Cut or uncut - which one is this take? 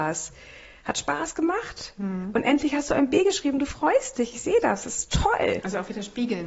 uncut